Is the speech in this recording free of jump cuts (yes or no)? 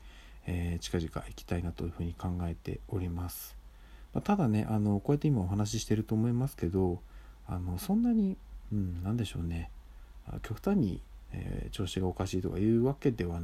yes